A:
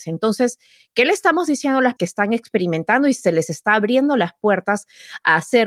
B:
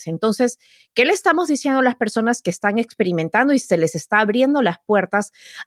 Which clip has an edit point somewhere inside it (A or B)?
A